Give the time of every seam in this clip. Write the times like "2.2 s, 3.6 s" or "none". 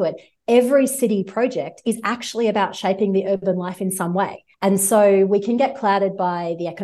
4.5 s